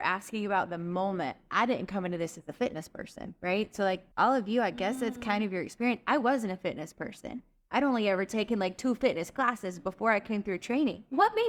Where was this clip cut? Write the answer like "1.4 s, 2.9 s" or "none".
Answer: 4.1 s

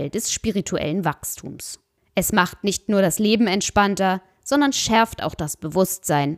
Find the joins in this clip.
none

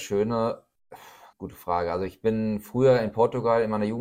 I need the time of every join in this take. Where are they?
1.3 s

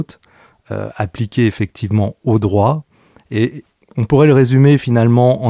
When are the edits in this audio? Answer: none

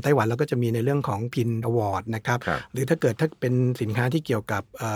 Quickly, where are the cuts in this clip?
1.3 s, 1.6 s

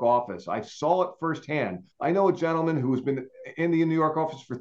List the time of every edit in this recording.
1.9 s

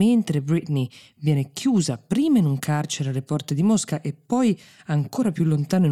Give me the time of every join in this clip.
none

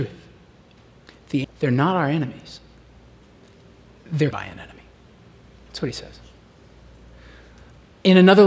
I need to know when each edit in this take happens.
1.4 s, 4.3 s

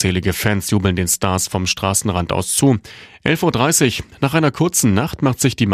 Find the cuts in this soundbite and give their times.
none

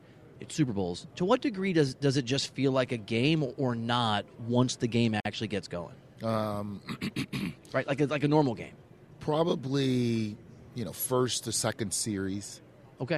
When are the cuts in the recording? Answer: 1.1 s

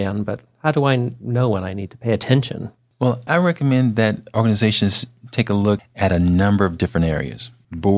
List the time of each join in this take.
none

